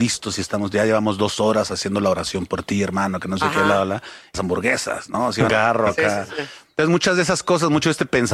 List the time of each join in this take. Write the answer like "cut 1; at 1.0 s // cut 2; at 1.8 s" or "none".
cut 1; at 4.3 s // cut 2; at 5.5 s